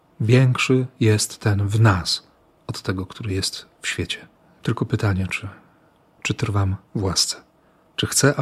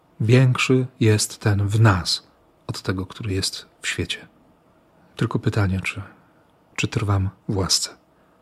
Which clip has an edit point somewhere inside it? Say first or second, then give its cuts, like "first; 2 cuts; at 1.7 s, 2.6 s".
first; 1 cut; at 4.3 s